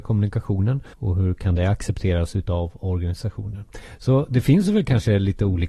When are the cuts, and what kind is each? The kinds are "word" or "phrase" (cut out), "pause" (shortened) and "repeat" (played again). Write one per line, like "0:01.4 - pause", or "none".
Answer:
0:00.9 - pause